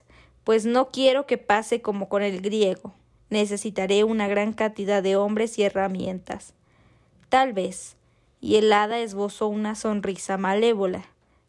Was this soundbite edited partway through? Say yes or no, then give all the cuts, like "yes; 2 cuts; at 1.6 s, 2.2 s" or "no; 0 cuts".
no; 0 cuts